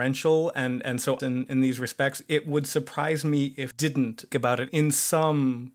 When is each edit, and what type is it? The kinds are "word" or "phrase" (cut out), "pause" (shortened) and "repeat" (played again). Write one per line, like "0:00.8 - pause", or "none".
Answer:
0:01.2 - word
0:03.7 - word
0:04.3 - word
0:04.7 - word